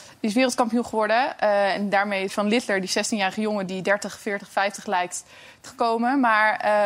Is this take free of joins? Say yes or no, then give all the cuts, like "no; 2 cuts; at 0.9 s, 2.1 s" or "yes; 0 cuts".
no; 3 cuts; at 2.3 s, 3.7 s, 5.7 s